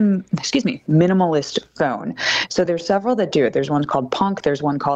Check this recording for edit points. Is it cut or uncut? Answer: uncut